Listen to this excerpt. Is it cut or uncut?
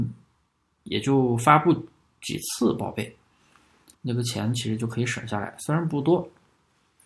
cut